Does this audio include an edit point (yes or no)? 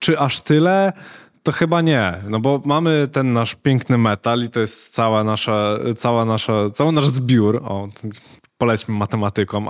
no